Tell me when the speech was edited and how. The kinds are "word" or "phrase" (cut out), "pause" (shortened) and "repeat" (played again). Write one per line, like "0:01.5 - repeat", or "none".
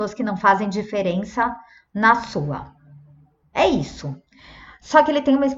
none

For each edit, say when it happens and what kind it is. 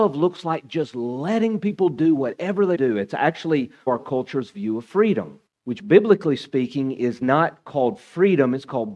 0:02.7 - phrase
0:03.9 - word
0:05.5 - pause

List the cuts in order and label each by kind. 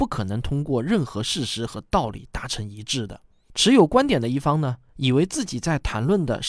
none

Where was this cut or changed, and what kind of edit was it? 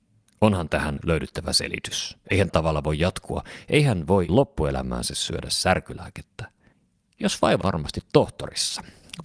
0:01.0 - word
0:02.5 - word
0:04.3 - word
0:06.7 - pause
0:07.6 - phrase

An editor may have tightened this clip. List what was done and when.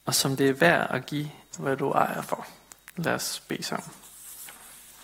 0:01.5 - word

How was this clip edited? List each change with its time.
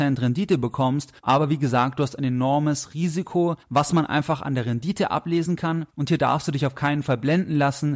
0:01.2 - pause
0:03.6 - pause
0:05.9 - pause

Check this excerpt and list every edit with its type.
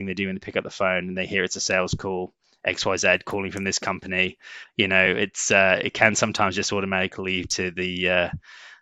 none

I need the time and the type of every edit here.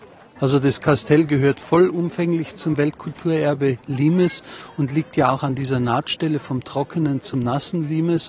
none

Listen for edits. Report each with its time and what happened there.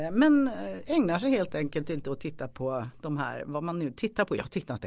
none

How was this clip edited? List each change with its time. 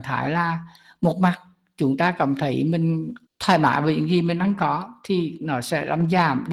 0:03.3 - pause

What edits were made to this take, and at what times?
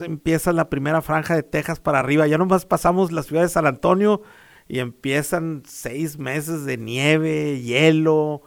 none

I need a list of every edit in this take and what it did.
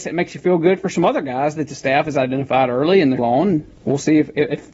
0:03.2 - word
0:03.8 - pause

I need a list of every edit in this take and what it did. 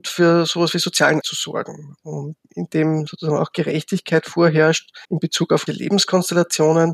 0:01.2 - word
0:02.4 - word
0:05.0 - pause
0:05.7 - word

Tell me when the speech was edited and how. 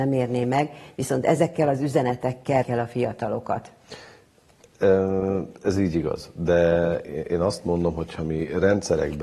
0:02.6 - word

